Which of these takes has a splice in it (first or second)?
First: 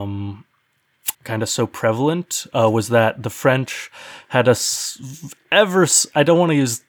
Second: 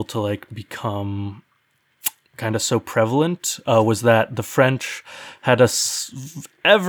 first